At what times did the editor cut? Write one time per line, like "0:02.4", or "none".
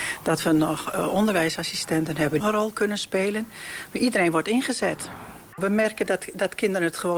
0:02.4